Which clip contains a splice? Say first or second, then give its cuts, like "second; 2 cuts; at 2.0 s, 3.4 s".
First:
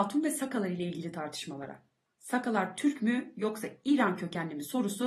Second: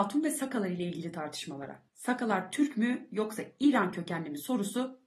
second; 1 cut; at 1.9 s